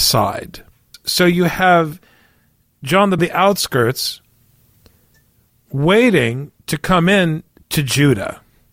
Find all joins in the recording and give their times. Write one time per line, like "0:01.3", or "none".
0:03.2
0:06.6